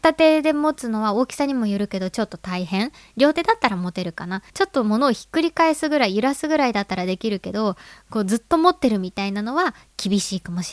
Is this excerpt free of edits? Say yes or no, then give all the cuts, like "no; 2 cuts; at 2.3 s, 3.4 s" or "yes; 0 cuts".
no; 1 cut; at 4.5 s